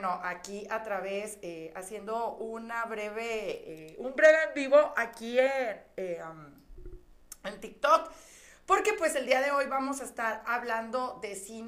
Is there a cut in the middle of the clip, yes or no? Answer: no